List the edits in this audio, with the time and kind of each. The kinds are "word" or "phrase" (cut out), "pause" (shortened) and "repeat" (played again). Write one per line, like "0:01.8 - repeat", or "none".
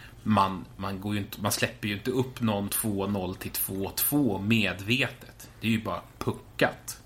0:02.7 - word